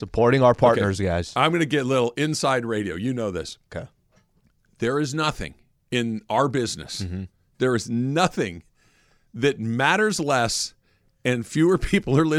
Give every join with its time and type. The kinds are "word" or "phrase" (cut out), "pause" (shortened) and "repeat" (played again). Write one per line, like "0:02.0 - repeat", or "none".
none